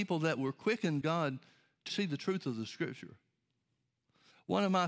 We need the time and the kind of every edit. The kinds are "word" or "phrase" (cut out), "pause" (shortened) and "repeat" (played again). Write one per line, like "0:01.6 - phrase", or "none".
0:01.0 - phrase
0:01.9 - word